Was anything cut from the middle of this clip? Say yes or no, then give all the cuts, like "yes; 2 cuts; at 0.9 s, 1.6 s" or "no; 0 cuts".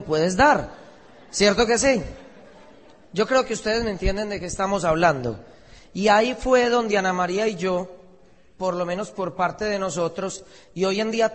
no; 0 cuts